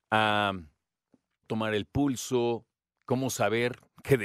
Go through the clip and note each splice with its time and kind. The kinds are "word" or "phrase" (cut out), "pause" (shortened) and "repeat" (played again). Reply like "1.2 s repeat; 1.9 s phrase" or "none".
1.4 s word

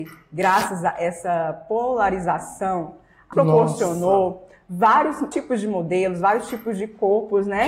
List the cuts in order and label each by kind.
3.3 s phrase; 5.3 s word

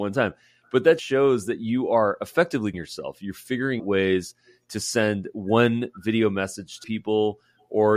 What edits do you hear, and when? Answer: 1.0 s word; 2.7 s word; 3.8 s word; 6.8 s word

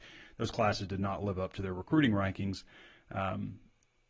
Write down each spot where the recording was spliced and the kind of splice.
none

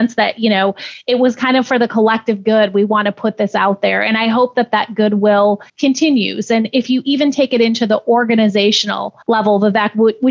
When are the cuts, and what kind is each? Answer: 5.7 s pause; 9.2 s pause

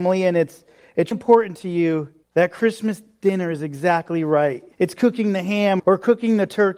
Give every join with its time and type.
1.1 s word; 2.2 s pause; 4.7 s pause; 5.8 s word

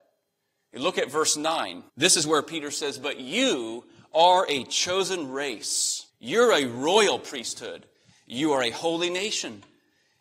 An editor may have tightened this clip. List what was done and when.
1.9 s pause; 6.1 s pause

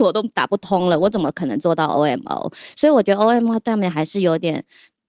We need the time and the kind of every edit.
none

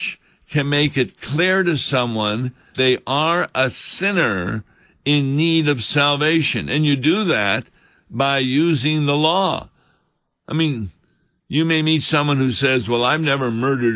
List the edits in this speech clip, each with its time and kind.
2.7 s word

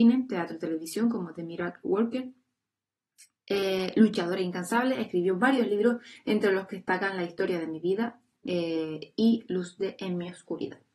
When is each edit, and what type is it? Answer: none

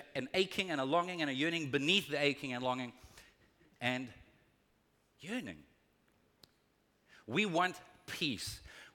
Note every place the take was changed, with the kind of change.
none

